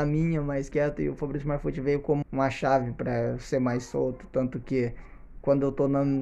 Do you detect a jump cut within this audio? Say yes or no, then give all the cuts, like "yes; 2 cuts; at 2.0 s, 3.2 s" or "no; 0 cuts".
yes; 1 cut; at 2.2 s